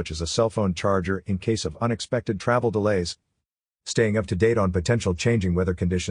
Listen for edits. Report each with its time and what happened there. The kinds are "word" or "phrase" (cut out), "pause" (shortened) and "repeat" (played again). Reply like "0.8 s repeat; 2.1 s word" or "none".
none